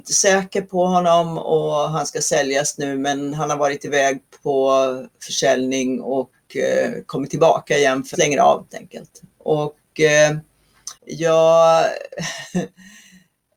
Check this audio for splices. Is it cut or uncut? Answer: cut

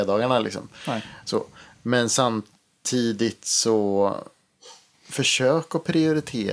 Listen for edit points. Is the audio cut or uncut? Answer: uncut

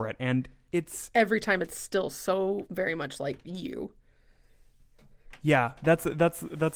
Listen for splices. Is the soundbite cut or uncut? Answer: uncut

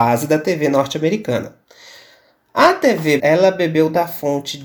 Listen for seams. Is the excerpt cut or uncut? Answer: cut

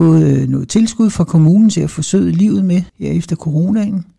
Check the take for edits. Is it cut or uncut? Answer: cut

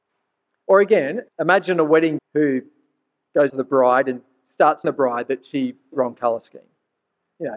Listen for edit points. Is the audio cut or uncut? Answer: cut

